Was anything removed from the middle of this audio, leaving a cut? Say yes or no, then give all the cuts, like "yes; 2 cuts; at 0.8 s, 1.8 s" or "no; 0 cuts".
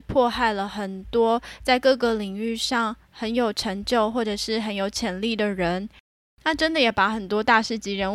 no; 0 cuts